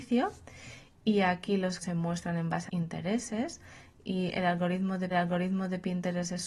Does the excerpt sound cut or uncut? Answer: cut